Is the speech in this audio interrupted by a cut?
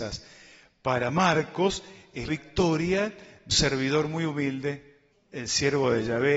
yes; 3 cuts; at 2.3 s, 3.5 s, 5.1 s

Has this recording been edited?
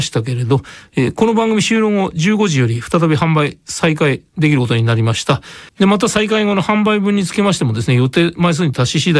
yes; 1 cut; at 5.7 s

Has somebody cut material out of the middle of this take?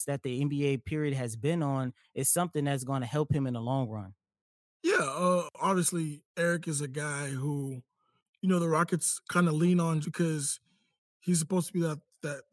yes; 2 cuts; at 6.3 s, 10.0 s

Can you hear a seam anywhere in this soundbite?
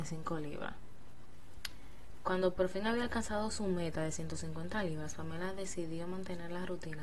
no; 0 cuts

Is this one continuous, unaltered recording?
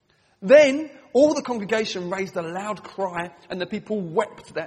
yes; 0 cuts

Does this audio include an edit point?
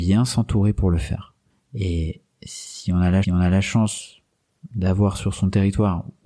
yes; 2 cuts; at 1.5 s, 3.2 s

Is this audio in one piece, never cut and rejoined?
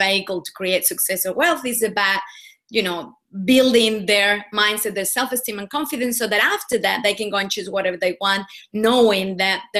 yes; 0 cuts

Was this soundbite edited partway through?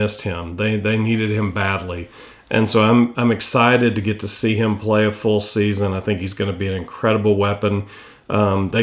no; 0 cuts

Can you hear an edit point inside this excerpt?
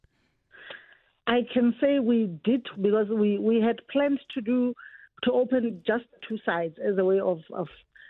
yes; 1 cut; at 2.7 s

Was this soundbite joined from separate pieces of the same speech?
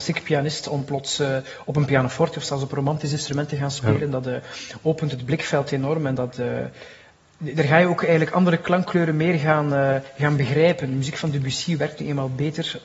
no; 0 cuts

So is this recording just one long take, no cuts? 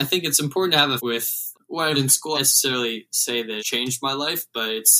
no; 5 cuts; at 1.0 s, 1.5 s, 1.9 s, 2.3 s, 3.6 s

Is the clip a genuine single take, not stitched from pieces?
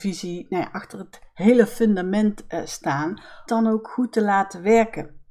no; 1 cut; at 3.5 s

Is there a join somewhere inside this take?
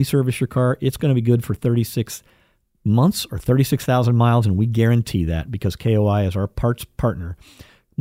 no; 0 cuts

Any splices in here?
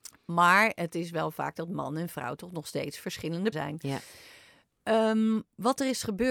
yes; 1 cut; at 3.5 s

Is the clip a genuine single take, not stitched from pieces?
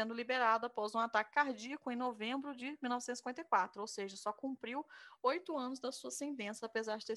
yes; 0 cuts

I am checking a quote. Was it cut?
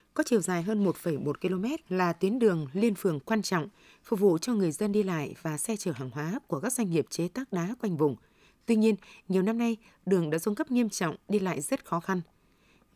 yes; 1 cut; at 1.8 s

